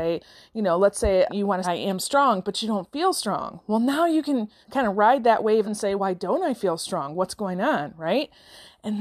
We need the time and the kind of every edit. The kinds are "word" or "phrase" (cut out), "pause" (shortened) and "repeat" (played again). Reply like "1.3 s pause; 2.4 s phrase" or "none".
1.3 s word; 1.6 s phrase; 4.6 s pause; 5.6 s phrase; 6.0 s word